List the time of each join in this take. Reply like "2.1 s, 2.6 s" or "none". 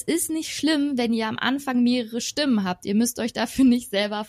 none

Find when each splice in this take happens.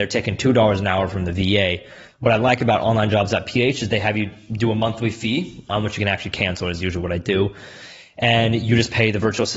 none

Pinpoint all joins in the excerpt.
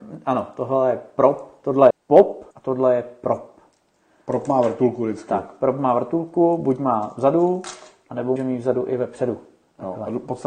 1.9 s, 2.5 s, 8.4 s

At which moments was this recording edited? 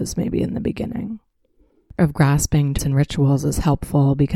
2.0 s, 2.8 s

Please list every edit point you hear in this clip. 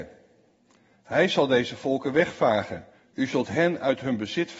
3.0 s

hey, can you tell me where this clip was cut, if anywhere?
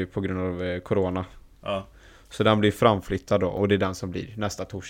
none

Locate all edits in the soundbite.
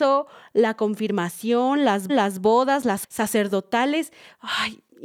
2.1 s, 3.0 s

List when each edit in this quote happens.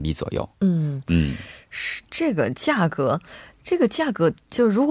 none

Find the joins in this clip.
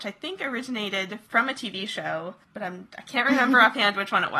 none

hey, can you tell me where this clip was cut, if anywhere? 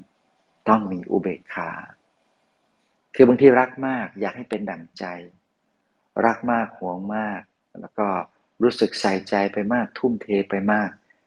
none

